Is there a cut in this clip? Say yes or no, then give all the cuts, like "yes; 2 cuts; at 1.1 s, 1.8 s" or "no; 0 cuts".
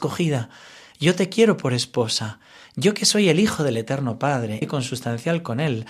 yes; 1 cut; at 4.6 s